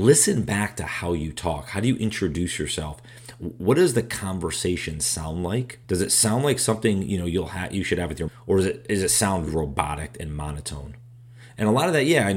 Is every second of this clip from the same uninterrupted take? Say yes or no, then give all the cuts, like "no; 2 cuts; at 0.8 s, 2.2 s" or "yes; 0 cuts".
no; 3 cuts; at 5.8 s, 8.3 s, 9.5 s